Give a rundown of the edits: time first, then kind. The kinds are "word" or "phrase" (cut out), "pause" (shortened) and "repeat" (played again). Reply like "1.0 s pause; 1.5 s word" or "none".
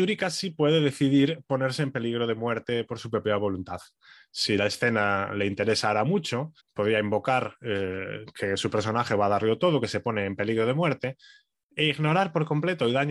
6.6 s pause